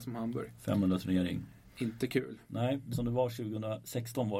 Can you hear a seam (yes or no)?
yes